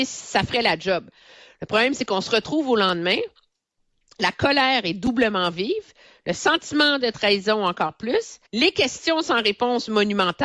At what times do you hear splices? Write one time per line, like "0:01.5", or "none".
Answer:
0:08.5